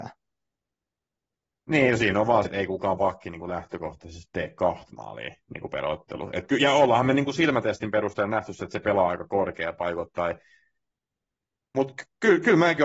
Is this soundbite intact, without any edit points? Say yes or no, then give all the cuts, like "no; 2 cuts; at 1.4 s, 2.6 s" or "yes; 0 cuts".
no; 1 cut; at 2.4 s